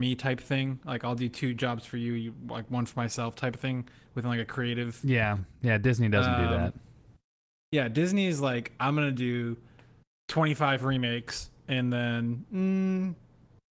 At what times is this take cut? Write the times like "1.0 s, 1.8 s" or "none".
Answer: none